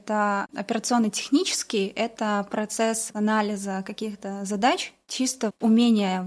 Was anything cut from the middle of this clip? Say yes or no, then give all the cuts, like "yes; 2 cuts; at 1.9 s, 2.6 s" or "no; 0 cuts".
no; 0 cuts